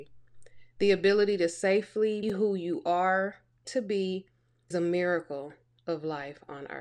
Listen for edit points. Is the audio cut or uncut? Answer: cut